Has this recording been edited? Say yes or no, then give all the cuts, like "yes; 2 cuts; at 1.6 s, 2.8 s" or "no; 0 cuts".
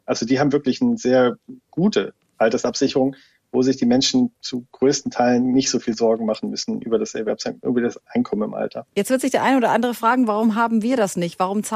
no; 0 cuts